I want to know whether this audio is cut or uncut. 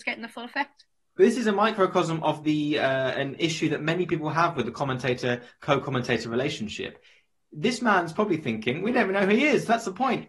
uncut